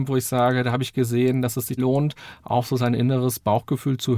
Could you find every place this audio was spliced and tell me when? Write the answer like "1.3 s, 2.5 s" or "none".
1.8 s